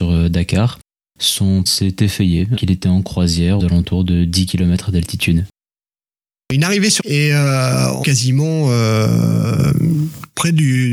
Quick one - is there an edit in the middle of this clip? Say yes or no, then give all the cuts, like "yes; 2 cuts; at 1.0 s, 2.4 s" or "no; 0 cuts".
yes; 5 cuts; at 1.7 s, 2.6 s, 3.6 s, 7.0 s, 8.0 s